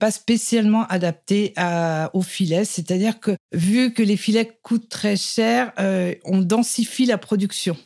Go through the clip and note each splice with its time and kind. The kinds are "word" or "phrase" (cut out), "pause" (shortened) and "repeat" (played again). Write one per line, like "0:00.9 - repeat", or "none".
none